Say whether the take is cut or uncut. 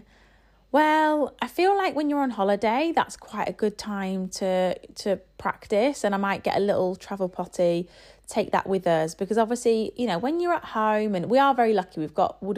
uncut